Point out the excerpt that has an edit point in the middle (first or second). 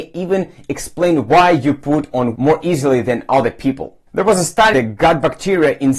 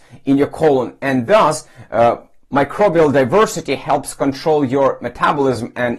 first